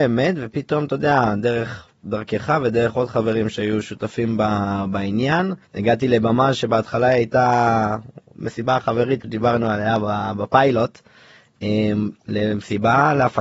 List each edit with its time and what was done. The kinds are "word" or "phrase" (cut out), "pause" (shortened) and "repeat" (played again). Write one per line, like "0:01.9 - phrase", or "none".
0:05.7 - pause
0:09.2 - word
0:12.2 - pause